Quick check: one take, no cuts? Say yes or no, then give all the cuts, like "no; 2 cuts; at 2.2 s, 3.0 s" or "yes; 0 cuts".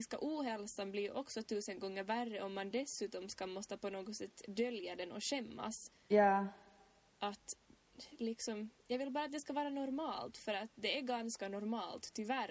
yes; 0 cuts